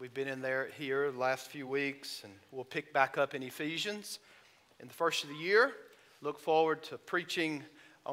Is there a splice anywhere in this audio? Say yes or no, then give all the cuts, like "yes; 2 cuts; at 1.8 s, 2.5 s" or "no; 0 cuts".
no; 0 cuts